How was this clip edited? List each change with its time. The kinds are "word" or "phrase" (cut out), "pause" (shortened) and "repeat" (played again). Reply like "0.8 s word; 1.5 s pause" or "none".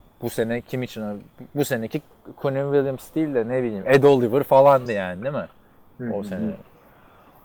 none